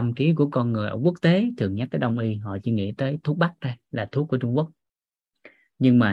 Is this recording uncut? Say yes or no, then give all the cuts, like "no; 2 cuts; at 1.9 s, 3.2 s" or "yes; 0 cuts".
yes; 0 cuts